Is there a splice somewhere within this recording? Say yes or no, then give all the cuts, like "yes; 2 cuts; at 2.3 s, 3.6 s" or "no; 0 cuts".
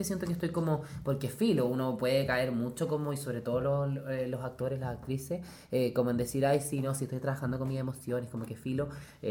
no; 0 cuts